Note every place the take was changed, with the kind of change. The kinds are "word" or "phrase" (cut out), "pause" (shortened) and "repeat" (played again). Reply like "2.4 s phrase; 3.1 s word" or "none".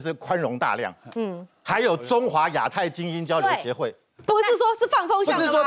none